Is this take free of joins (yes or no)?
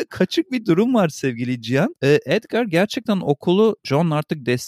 yes